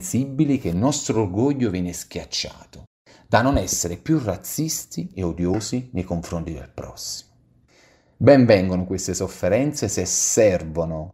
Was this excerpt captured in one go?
yes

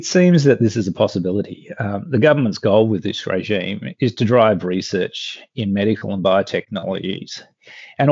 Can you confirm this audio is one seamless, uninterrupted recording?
yes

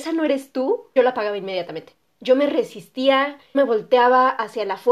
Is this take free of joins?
no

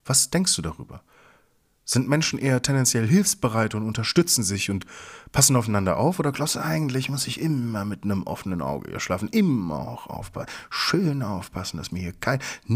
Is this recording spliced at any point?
no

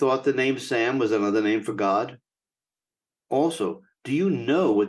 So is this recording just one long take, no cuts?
yes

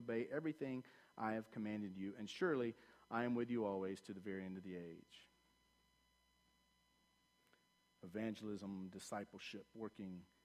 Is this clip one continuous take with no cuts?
yes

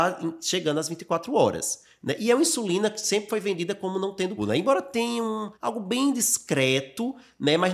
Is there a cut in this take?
yes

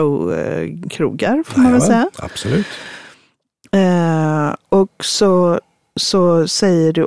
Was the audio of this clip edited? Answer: no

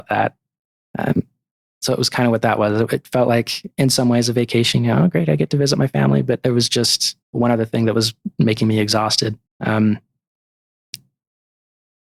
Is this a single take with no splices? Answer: no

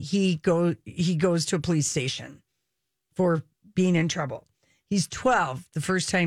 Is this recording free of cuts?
yes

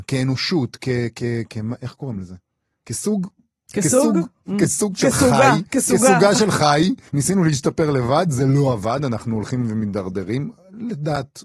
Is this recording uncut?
no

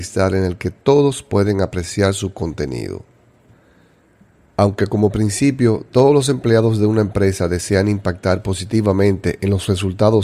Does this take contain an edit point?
no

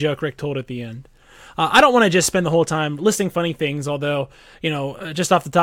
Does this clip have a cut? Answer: no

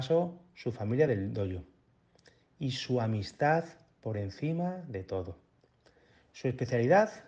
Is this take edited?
no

